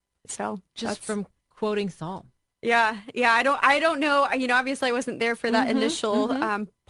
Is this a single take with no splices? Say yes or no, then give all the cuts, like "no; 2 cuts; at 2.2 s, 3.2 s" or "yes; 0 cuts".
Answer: yes; 0 cuts